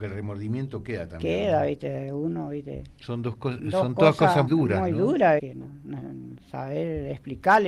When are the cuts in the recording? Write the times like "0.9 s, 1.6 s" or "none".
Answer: 4.5 s, 5.4 s

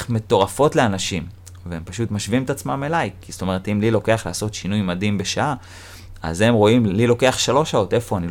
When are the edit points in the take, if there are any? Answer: none

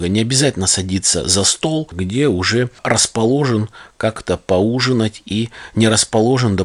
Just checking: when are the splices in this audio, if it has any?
none

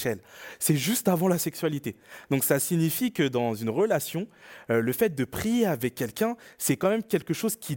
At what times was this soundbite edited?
none

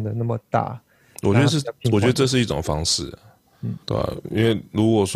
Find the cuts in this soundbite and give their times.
3.8 s

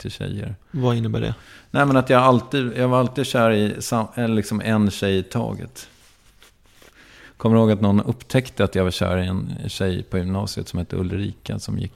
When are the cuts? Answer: none

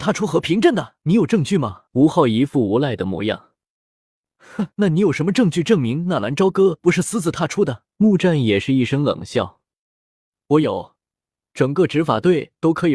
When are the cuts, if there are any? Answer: 1.0 s, 1.9 s, 4.7 s, 7.9 s

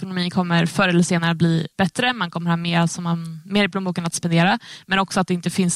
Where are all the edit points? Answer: 1.7 s

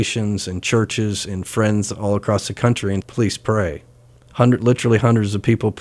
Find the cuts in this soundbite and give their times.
3.0 s

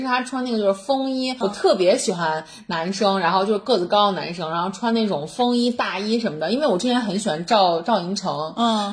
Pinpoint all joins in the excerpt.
1.4 s

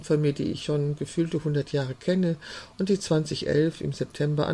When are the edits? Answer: none

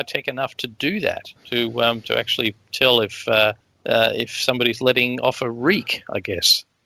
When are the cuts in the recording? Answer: 1.4 s, 3.6 s

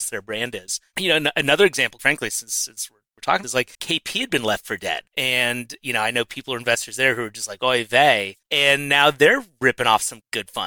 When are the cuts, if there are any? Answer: 2.0 s, 3.4 s, 3.7 s, 5.1 s

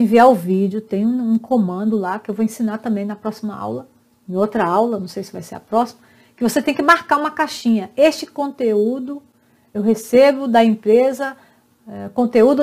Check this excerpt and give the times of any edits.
9.7 s

